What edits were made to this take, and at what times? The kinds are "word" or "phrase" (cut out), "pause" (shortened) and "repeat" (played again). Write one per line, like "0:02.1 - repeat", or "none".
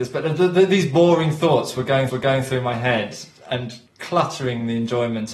0:02.1 - repeat
0:03.9 - pause